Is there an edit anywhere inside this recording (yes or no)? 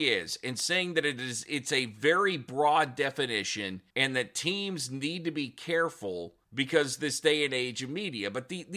yes